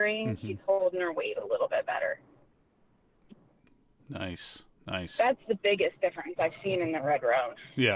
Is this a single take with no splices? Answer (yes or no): yes